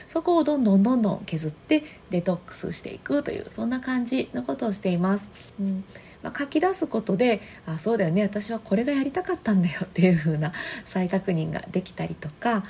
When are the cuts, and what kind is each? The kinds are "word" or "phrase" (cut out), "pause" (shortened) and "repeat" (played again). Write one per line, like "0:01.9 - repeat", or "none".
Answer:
0:05.5 - pause